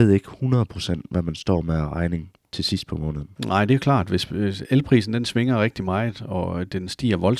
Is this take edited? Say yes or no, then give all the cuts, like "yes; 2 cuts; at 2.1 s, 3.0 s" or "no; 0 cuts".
yes; 1 cut; at 3.4 s